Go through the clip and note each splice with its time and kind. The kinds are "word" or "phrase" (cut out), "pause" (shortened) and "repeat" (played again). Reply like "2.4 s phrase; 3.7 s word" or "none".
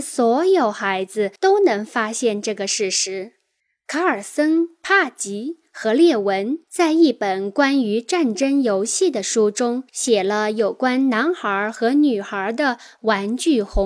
1.4 s pause; 3.6 s pause; 6.6 s pause; 9.9 s pause